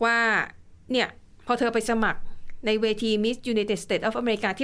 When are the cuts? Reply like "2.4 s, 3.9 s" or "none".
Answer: none